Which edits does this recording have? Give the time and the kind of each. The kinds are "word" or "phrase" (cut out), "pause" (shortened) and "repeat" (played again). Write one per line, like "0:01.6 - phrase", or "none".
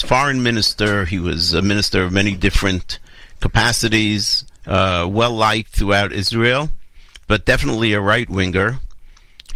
0:04.6 - pause